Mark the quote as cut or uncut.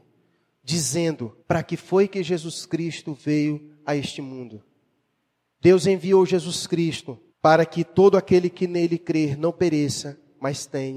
cut